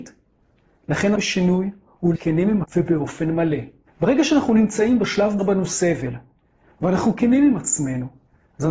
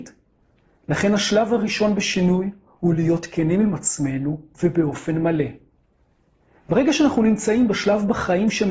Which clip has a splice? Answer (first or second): first